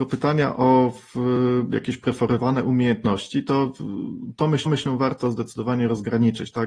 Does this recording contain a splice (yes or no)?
yes